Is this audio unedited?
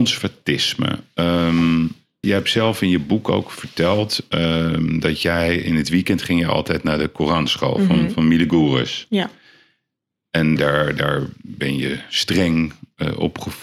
no; 2 cuts; at 2.2 s, 10.6 s

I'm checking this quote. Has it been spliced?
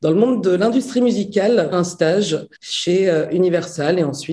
yes; 2 cuts; at 1.7 s, 2.6 s

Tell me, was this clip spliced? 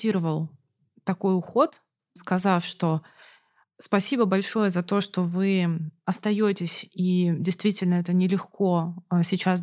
no; 0 cuts

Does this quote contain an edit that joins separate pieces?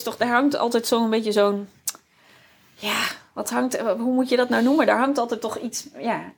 no; 0 cuts

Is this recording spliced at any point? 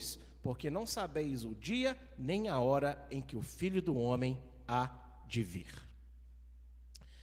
no; 0 cuts

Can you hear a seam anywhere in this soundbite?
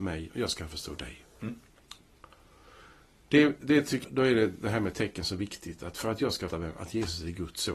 yes; 2 cuts; at 4.0 s, 6.5 s

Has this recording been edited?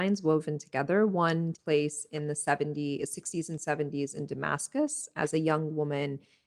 yes; 1 cut; at 1.5 s

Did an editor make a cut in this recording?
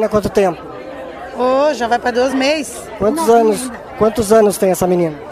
no; 0 cuts

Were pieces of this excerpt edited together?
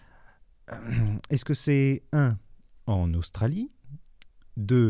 no; 0 cuts

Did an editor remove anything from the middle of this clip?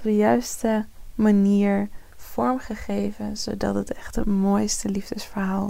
no; 0 cuts

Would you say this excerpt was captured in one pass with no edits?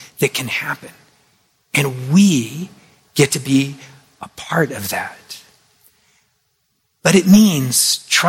yes; 0 cuts

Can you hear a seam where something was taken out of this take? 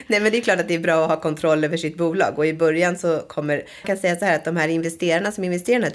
yes; 1 cut; at 3.8 s

